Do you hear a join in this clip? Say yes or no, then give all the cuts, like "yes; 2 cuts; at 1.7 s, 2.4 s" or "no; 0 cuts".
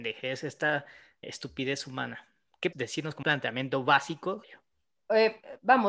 yes; 4 cuts; at 1.2 s, 2.7 s, 3.2 s, 4.4 s